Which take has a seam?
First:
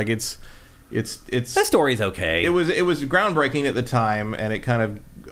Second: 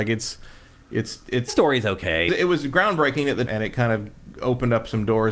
second; 3 cuts; at 1.5 s, 2.3 s, 3.5 s

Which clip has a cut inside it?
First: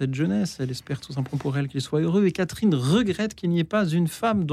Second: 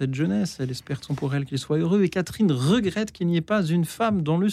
second; 1 cut; at 1.1 s

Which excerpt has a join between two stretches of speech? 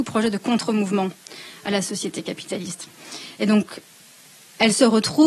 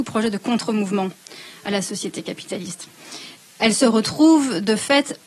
second; 1 cut; at 3.4 s

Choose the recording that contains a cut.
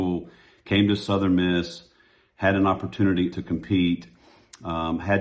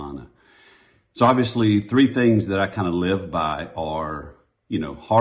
first; 1 cut; at 3.3 s

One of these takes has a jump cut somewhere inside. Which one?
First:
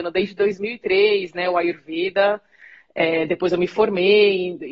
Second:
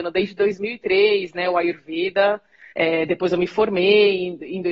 second; 1 cut; at 2.7 s

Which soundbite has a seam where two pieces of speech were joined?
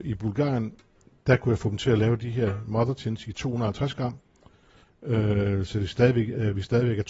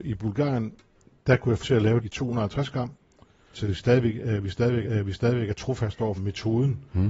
second; 5 cuts; at 1.6 s, 2.0 s, 3.5 s, 4.8 s, 6.2 s

